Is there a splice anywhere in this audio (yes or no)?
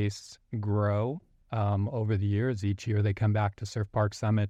no